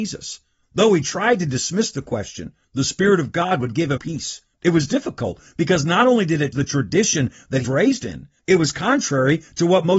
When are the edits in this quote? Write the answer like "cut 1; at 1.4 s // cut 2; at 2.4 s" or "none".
cut 1; at 4.0 s // cut 2; at 6.5 s // cut 3; at 7.6 s